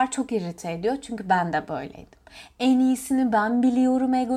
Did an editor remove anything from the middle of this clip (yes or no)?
no